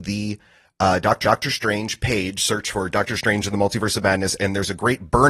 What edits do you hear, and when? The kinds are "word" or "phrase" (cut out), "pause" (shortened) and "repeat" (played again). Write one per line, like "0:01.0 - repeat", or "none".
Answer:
0:01.2 - repeat